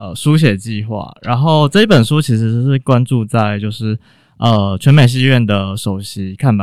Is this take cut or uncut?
uncut